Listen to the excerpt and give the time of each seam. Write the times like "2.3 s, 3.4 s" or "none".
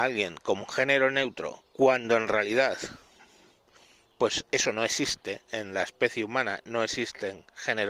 none